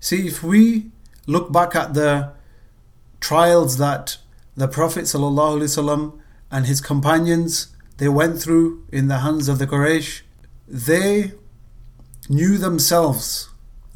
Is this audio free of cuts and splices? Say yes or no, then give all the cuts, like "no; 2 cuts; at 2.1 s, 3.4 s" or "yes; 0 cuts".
yes; 0 cuts